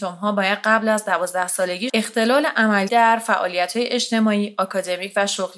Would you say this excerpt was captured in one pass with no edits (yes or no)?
no